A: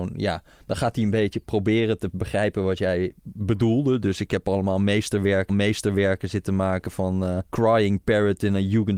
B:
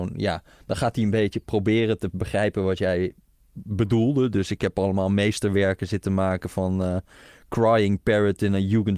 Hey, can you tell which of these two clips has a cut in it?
A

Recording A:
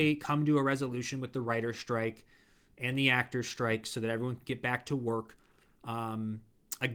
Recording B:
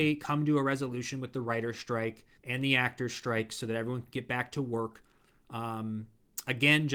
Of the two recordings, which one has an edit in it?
B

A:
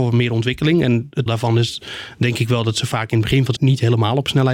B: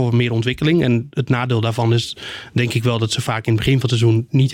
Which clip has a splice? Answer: A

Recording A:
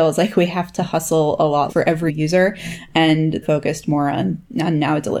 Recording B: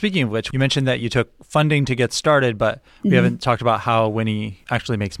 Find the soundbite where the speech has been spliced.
A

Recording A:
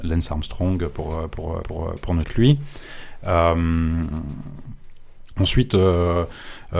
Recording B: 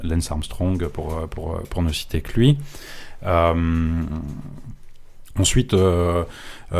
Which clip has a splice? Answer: A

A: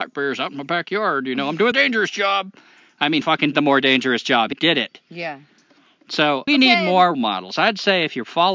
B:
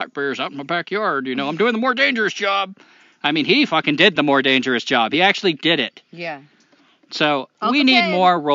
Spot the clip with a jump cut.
A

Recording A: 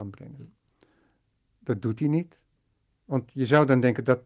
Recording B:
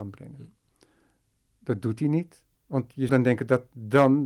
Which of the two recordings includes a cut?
B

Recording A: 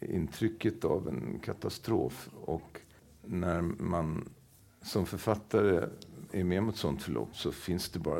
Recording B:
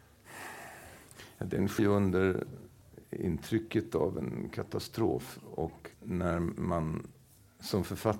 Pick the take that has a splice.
B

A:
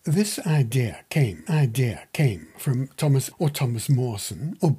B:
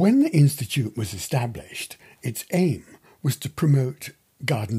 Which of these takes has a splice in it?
A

